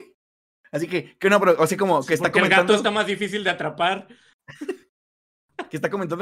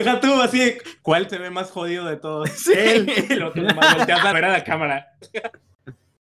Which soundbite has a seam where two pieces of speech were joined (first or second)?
second